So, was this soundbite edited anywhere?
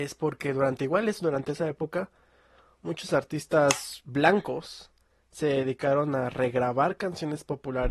no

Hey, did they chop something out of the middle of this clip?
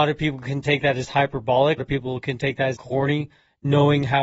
yes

